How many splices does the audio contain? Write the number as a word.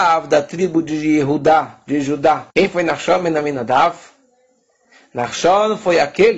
one